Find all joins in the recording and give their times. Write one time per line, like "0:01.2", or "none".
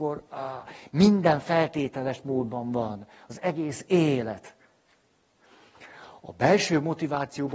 none